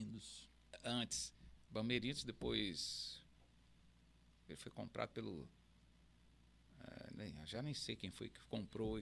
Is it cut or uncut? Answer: uncut